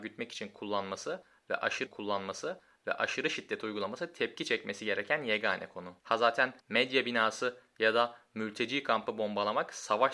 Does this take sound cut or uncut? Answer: cut